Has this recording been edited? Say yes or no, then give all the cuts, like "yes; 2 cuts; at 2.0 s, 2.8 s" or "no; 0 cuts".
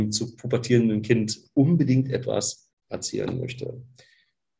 yes; 1 cut; at 2.8 s